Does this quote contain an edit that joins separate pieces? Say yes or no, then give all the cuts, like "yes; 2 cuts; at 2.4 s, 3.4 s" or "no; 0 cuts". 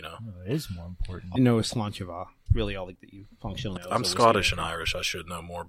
yes; 4 cuts; at 1.4 s, 2.5 s, 2.9 s, 3.8 s